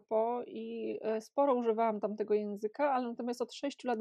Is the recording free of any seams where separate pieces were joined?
yes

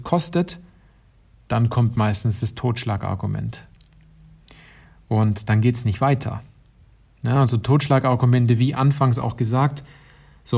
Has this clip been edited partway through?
no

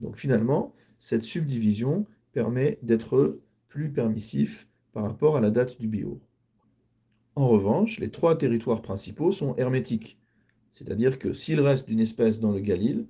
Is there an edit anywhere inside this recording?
no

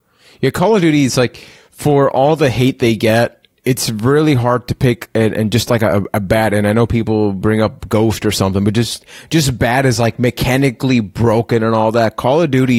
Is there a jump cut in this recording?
yes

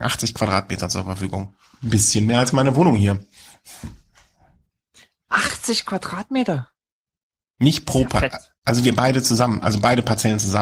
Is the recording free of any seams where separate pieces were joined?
yes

